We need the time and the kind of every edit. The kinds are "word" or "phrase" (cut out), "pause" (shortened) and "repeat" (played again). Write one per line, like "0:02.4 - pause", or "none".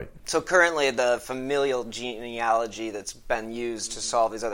none